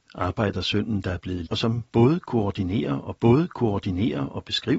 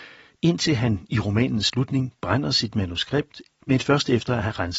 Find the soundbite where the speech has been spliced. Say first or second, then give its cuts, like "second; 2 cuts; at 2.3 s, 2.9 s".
first; 2 cuts; at 1.5 s, 3.2 s